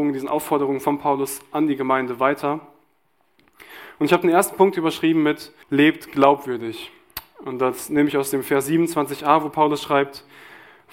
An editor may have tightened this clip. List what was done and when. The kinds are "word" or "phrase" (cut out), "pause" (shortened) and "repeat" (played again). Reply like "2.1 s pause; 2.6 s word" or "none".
5.6 s pause